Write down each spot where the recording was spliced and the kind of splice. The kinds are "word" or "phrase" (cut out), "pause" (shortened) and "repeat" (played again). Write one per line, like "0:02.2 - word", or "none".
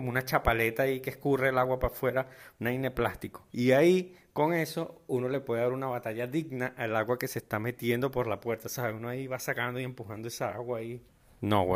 0:03.5 - pause